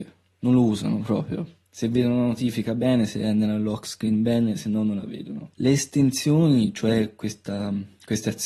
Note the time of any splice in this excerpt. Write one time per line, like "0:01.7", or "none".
0:05.5